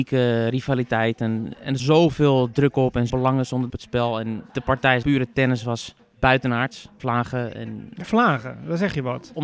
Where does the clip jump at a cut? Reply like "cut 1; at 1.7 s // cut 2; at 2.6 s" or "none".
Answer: cut 1; at 1.8 s // cut 2; at 3.1 s // cut 3; at 3.7 s // cut 4; at 5.0 s // cut 5; at 7.0 s // cut 6; at 8.0 s